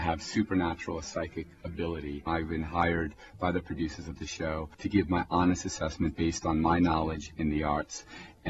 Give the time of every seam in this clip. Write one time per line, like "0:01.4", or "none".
0:04.7